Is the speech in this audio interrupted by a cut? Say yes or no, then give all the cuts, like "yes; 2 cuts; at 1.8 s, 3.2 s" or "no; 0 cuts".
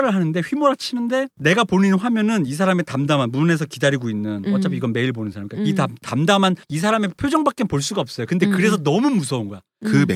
no; 0 cuts